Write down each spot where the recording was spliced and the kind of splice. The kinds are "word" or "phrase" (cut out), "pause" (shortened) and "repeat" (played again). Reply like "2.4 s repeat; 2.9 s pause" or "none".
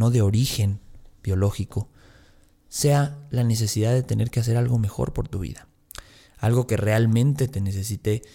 none